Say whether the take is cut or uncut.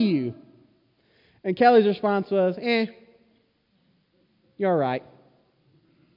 uncut